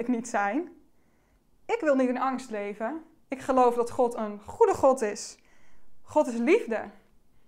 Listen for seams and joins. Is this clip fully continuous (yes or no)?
no